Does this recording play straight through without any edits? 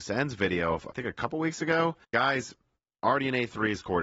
no; 2 cuts; at 0.9 s, 2.0 s

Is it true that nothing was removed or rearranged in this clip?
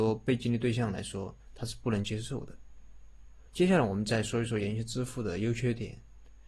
no; 1 cut; at 3.5 s

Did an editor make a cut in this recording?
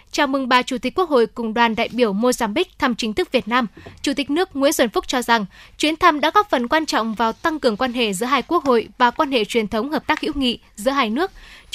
no; 0 cuts

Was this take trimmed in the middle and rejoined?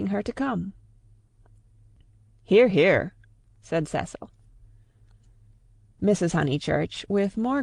no; 0 cuts

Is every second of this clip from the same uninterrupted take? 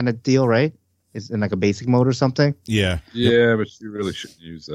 yes; 0 cuts

